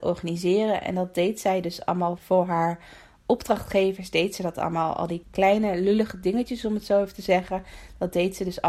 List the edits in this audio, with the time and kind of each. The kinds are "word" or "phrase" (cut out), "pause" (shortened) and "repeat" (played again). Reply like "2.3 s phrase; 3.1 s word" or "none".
2.2 s word; 5.2 s word